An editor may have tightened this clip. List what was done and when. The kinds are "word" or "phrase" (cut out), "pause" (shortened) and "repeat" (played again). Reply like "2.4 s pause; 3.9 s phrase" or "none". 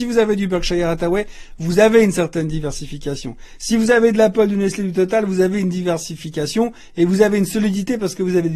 none